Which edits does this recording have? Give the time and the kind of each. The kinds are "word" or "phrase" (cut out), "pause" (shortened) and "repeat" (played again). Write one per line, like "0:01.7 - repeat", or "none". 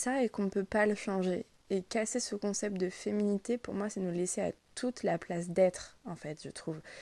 none